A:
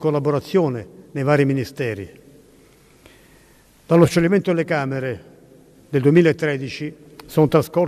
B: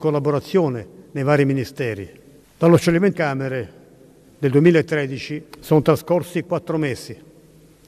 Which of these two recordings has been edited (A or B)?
B